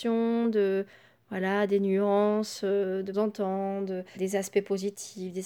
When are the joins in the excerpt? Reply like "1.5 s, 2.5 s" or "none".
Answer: 3.1 s, 4.1 s

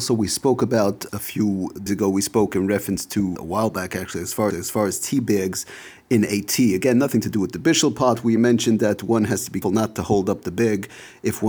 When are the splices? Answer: 1.1 s, 1.9 s, 3.4 s, 4.5 s, 9.6 s

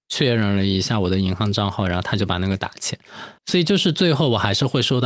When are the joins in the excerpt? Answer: 3.4 s

